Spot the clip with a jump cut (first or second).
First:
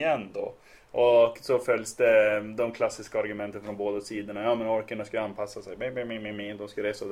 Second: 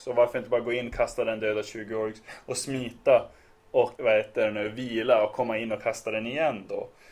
second